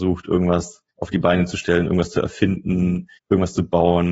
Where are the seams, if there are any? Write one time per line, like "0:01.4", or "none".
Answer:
0:00.9
0:03.2